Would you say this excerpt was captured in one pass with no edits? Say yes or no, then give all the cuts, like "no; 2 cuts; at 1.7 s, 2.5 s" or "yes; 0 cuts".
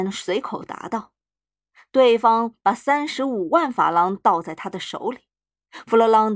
yes; 0 cuts